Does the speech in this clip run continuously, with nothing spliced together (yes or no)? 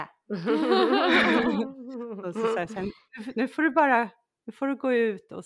yes